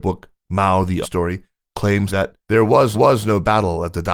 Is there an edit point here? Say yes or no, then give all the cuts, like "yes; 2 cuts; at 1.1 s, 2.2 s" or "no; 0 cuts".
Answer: yes; 4 cuts; at 1.0 s, 2.1 s, 2.4 s, 2.9 s